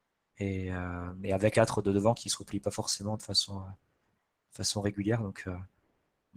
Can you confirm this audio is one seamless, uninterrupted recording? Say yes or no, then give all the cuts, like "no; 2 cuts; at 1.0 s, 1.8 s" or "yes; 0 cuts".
no; 1 cut; at 1.5 s